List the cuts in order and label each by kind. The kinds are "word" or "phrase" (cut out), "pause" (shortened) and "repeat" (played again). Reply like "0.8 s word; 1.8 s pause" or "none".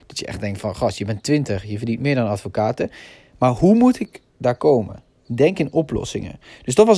none